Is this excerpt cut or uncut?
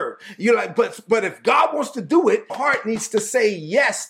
cut